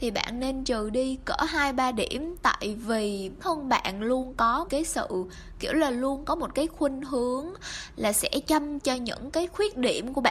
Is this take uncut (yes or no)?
no